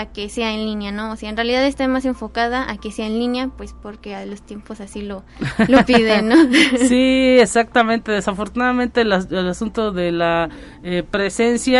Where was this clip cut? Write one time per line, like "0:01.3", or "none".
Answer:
none